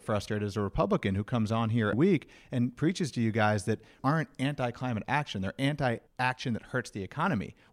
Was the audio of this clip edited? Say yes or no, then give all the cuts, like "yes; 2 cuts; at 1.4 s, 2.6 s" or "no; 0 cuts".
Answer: yes; 3 cuts; at 1.9 s, 4.0 s, 6.1 s